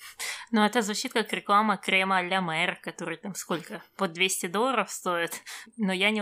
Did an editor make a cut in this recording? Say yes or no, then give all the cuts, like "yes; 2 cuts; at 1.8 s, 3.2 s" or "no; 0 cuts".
no; 0 cuts